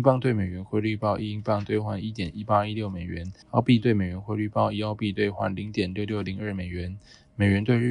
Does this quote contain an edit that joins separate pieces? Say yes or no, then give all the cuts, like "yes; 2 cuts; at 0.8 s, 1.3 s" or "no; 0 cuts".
yes; 1 cut; at 3.4 s